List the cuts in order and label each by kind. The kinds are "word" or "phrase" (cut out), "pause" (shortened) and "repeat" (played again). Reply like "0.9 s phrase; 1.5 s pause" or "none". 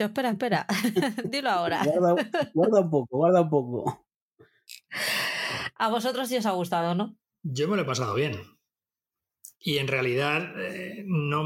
none